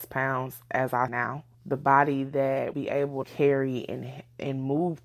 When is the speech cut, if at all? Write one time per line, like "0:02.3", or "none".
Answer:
0:01.1
0:01.5
0:02.7
0:03.2